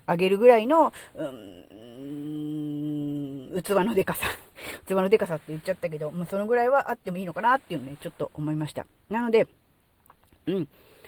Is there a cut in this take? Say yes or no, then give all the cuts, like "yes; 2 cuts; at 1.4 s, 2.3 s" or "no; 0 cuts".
no; 0 cuts